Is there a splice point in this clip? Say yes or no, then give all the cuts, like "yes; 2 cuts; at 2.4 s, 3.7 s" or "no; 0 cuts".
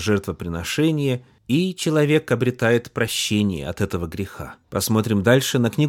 no; 0 cuts